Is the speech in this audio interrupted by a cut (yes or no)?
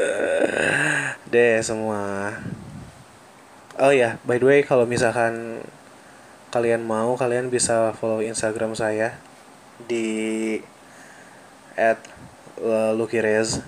no